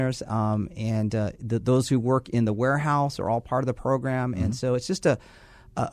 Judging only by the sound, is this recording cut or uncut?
uncut